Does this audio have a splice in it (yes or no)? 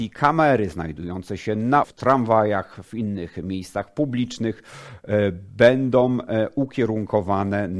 yes